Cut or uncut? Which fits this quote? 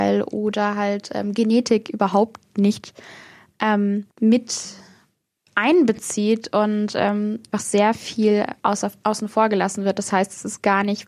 cut